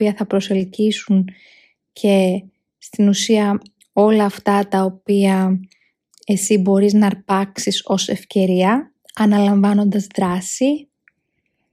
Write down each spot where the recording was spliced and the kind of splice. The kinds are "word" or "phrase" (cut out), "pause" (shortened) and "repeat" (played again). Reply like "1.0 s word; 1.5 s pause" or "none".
none